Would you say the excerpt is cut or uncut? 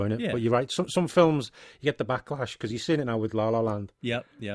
uncut